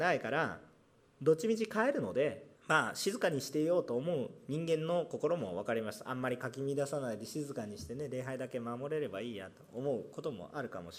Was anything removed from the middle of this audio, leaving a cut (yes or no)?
yes